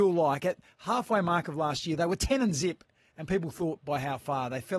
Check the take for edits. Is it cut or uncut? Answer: uncut